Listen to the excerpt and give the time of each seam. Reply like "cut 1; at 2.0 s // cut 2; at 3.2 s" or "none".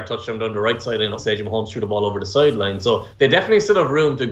cut 1; at 1.2 s // cut 2; at 3.1 s

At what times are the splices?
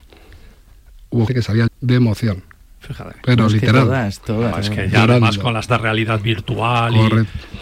cut 1; at 1.3 s // cut 2; at 1.7 s // cut 3; at 4.5 s // cut 4; at 5.7 s

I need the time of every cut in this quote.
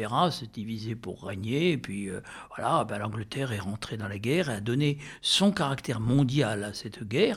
none

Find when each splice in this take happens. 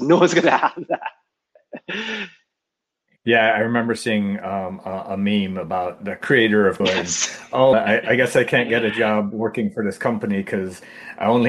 cut 1; at 6.0 s // cut 2; at 6.8 s // cut 3; at 7.7 s

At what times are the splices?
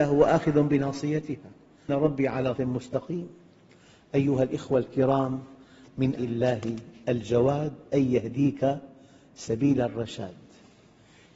cut 1; at 1.9 s // cut 2; at 2.6 s // cut 3; at 6.2 s

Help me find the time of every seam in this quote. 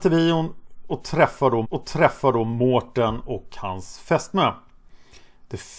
cut 1; at 1.6 s

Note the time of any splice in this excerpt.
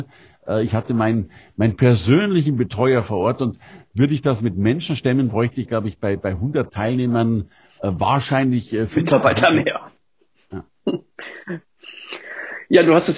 none

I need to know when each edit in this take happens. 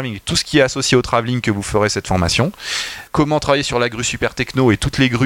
cut 1; at 3.1 s

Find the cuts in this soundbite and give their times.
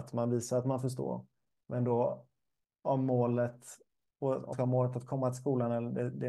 cut 1; at 2.7 s // cut 2; at 4.5 s

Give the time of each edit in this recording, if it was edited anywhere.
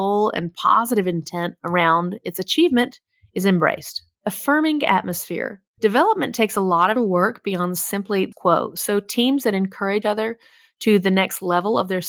cut 1; at 7.0 s // cut 2; at 8.3 s // cut 3; at 10.0 s

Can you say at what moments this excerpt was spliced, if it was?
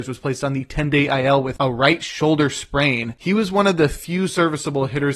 none

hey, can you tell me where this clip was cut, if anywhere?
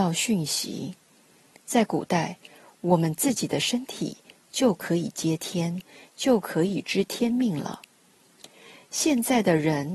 none

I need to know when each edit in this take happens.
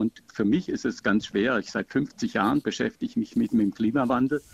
none

